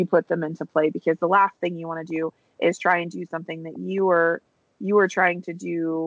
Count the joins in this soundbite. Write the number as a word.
zero